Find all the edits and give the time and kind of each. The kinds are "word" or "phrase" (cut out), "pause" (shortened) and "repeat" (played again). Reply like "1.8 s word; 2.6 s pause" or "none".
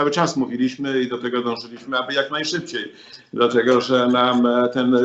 none

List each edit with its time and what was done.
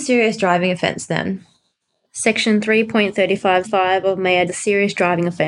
3.6 s word; 4.5 s word

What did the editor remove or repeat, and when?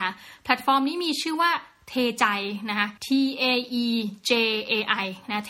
3.0 s pause

